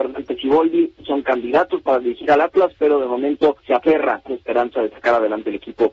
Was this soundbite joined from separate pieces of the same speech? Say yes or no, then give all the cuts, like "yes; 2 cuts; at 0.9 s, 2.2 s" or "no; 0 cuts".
yes; 2 cuts; at 3.6 s, 4.3 s